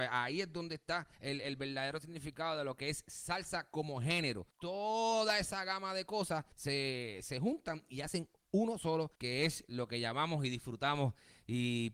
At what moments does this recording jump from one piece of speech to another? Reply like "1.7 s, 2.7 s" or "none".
1.1 s, 4.5 s, 6.5 s, 9.1 s